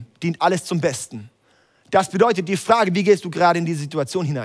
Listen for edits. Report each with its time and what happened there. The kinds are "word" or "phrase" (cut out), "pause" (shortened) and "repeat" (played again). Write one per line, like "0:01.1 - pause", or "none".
none